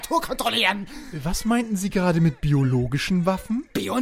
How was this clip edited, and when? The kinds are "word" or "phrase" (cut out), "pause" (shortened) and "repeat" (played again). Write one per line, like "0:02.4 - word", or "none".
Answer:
none